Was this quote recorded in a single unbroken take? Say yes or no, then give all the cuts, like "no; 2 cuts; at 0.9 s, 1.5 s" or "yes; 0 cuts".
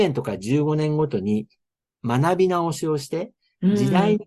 yes; 0 cuts